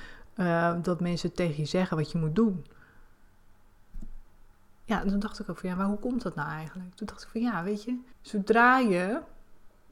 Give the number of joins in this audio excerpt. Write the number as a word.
one